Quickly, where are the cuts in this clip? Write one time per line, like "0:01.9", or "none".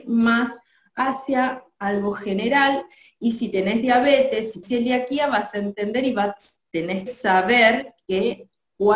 0:04.6
0:07.1